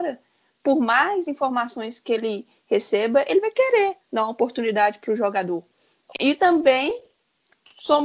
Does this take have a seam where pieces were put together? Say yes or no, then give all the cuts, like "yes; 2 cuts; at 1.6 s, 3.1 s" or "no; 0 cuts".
no; 0 cuts